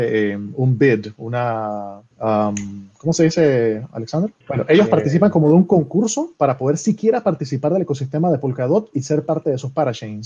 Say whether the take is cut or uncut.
cut